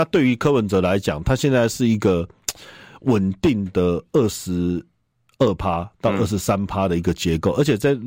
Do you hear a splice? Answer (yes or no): no